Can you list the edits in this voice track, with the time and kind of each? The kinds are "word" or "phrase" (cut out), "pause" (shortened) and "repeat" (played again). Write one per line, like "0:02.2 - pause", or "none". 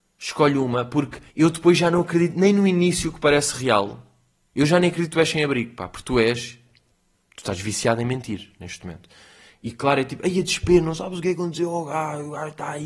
0:01.3 - pause
0:06.9 - pause